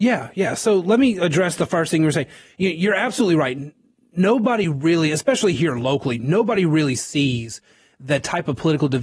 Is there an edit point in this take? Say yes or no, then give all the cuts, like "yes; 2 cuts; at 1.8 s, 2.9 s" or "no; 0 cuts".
no; 0 cuts